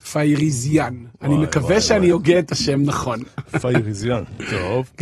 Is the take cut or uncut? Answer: uncut